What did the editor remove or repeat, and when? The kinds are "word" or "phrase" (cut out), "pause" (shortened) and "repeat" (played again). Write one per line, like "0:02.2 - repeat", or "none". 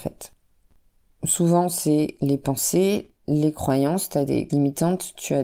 0:04.5 - word